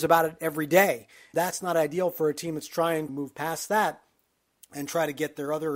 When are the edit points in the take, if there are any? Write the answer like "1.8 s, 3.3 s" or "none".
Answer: 1.3 s, 3.1 s